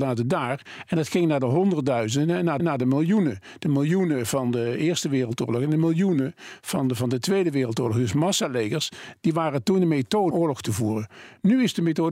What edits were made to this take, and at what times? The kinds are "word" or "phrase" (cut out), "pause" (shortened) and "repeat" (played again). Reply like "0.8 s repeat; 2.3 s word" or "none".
2.6 s repeat; 10.3 s word